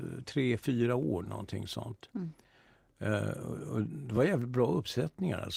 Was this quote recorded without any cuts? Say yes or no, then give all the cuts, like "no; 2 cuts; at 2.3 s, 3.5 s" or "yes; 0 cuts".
yes; 0 cuts